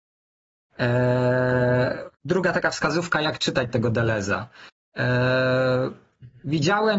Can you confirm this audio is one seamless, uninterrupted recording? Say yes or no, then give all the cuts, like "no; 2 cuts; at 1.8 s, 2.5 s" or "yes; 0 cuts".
no; 1 cut; at 2.1 s